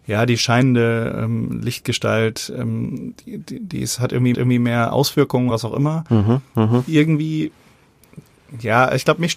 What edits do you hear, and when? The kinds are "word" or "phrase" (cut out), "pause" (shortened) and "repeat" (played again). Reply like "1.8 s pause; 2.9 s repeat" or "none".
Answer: 4.3 s repeat; 5.5 s word